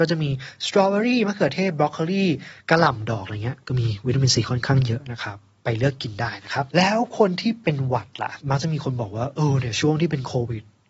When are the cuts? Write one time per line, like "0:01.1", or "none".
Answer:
0:02.6
0:08.4